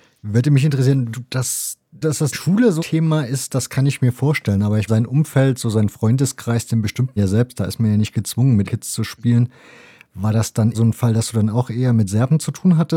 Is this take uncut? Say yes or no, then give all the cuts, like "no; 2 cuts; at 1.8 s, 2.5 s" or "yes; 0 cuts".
no; 8 cuts; at 1.1 s, 2.0 s, 2.3 s, 2.8 s, 4.9 s, 7.2 s, 8.7 s, 10.7 s